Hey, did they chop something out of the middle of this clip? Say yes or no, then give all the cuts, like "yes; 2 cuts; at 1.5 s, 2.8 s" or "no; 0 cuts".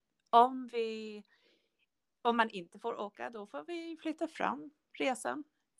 no; 0 cuts